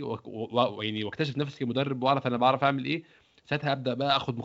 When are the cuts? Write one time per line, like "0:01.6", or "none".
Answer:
none

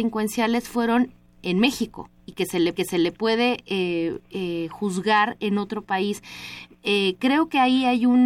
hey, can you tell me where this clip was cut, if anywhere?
0:02.8

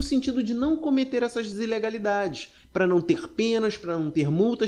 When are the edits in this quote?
none

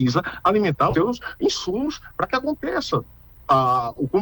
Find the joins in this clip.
0:00.9

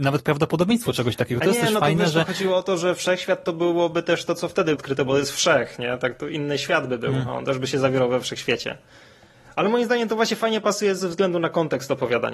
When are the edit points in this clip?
0:04.8

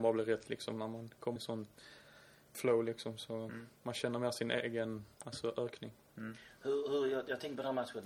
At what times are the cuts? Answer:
0:01.4
0:02.5
0:03.8
0:05.1

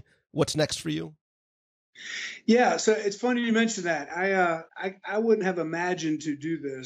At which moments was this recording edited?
0:04.7

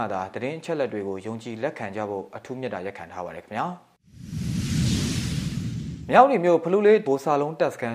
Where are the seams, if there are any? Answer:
0:07.0

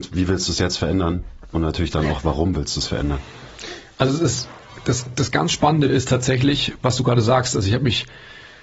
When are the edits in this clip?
0:05.9

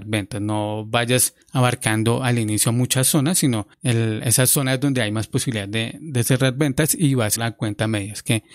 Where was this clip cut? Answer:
0:01.4
0:03.7
0:07.4

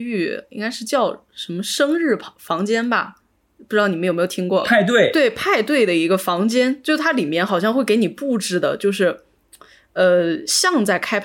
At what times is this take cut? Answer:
none

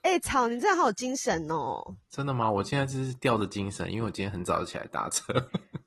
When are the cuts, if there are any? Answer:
0:02.0

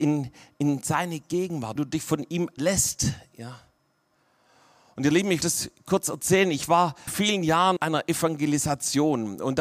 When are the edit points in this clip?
0:01.8
0:02.6
0:05.4
0:07.1
0:07.8

